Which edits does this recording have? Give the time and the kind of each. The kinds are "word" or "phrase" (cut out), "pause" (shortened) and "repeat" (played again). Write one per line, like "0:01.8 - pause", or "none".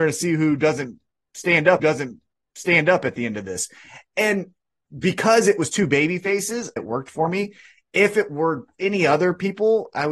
0:01.8 - repeat
0:06.8 - phrase